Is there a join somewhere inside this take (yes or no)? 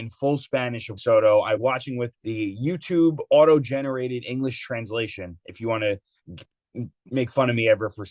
yes